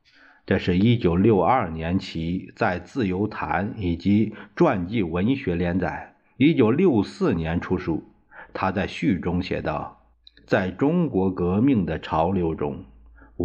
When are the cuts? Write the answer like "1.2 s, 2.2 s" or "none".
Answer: 10.1 s